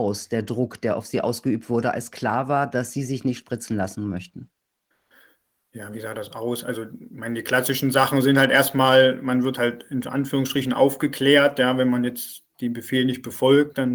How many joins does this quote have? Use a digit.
0